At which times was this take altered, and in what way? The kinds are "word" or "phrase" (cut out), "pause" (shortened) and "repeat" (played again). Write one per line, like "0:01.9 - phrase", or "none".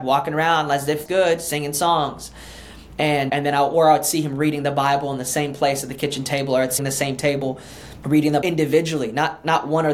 0:01.1 - word
0:03.3 - word
0:06.8 - phrase
0:08.0 - word
0:08.4 - word

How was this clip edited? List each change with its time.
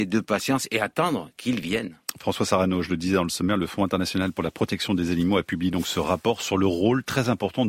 none

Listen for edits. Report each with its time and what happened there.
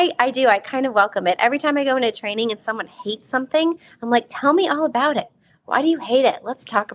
none

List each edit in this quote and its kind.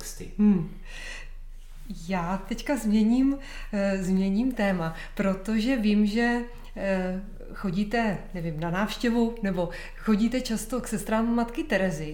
none

